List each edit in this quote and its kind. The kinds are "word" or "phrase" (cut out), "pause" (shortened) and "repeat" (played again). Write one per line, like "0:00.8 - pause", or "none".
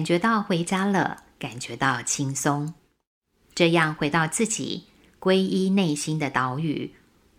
none